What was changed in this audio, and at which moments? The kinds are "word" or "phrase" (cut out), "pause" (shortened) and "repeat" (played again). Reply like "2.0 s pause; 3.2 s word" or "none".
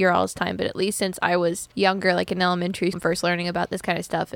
1.7 s pause; 2.9 s word